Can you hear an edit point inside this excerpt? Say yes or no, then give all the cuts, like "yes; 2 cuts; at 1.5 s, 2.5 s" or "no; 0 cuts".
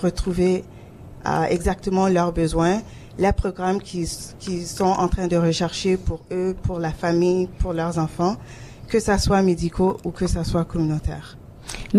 no; 0 cuts